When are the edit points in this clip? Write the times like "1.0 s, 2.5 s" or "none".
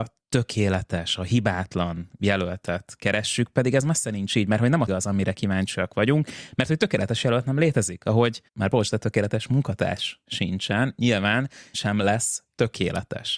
4.9 s, 8.5 s, 11.7 s